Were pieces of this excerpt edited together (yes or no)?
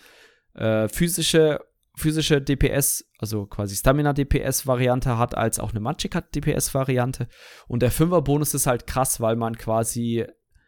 no